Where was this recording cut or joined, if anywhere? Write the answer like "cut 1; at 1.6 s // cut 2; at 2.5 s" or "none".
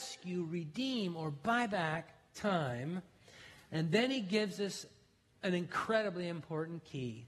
none

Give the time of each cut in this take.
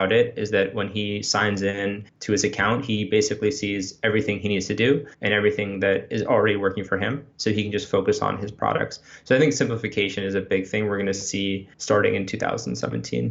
cut 1; at 2.1 s // cut 2; at 5.1 s // cut 3; at 11.7 s

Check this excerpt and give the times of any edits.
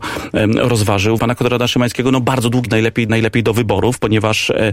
cut 1; at 1.2 s // cut 2; at 2.7 s // cut 3; at 3.1 s

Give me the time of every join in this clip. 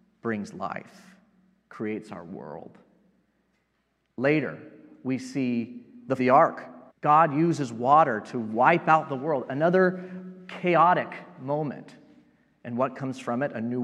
cut 1; at 6.2 s // cut 2; at 6.9 s

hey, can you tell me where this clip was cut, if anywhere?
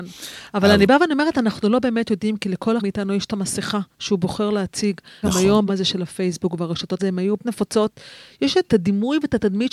cut 1; at 2.8 s // cut 2; at 3.9 s // cut 3; at 5.2 s // cut 4; at 5.7 s // cut 5; at 7.0 s // cut 6; at 7.4 s // cut 7; at 8.7 s

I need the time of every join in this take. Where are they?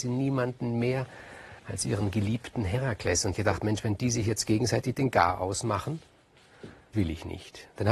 cut 1; at 1.6 s // cut 2; at 3.3 s // cut 3; at 6.9 s

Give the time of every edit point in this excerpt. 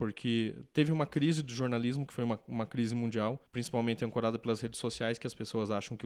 cut 1; at 3.5 s

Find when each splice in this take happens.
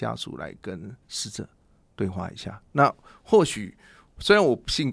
cut 1; at 1.0 s

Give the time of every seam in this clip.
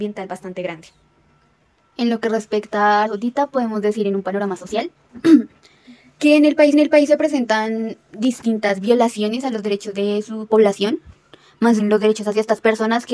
cut 1; at 3.1 s // cut 2; at 6.7 s // cut 3; at 11.8 s

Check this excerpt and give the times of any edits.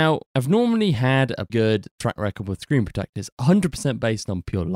cut 1; at 1.5 s

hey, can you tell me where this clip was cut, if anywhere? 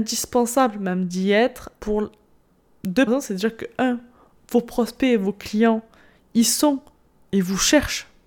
cut 1; at 1.8 s // cut 2; at 3.1 s

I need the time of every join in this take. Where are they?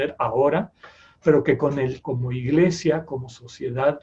cut 1; at 2.0 s

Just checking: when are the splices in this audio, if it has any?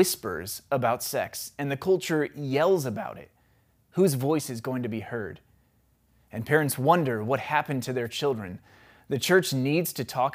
none

